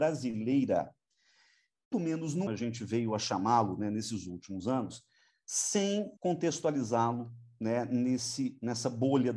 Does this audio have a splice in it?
yes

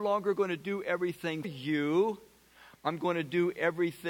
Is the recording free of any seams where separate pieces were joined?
no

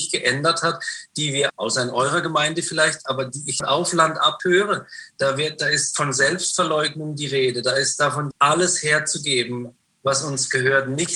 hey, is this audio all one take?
no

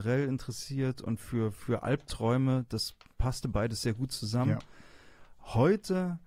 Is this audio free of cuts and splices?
yes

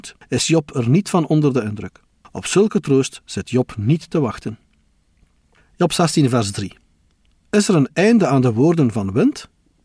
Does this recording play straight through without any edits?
yes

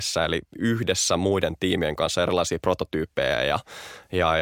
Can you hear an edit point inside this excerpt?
no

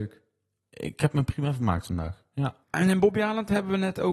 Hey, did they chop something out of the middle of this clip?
yes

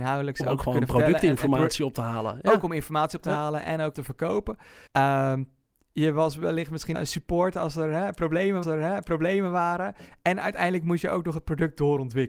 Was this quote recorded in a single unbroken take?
no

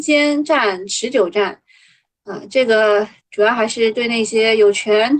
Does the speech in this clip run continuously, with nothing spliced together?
yes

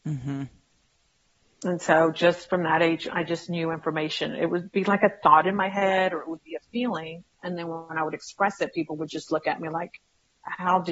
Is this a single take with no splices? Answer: no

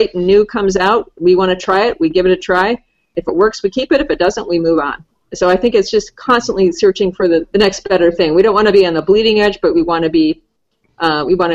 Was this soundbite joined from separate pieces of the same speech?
no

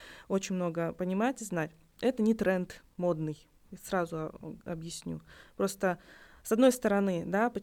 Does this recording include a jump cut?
no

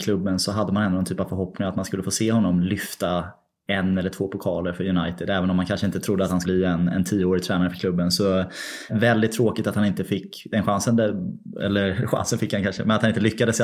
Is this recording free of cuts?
no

